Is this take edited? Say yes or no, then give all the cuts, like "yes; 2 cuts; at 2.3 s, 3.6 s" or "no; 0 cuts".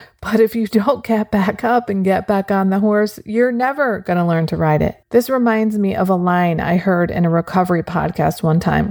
yes; 1 cut; at 5.0 s